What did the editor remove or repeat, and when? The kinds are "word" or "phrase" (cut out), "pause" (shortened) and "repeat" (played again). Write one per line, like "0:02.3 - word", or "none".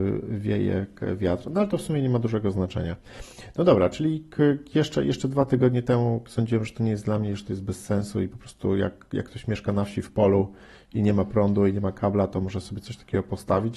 none